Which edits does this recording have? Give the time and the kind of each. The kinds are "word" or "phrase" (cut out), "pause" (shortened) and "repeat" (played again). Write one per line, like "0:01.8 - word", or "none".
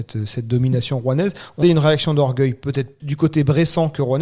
0:01.6 - word
0:03.0 - word